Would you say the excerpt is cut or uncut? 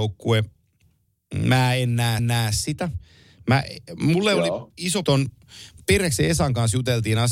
cut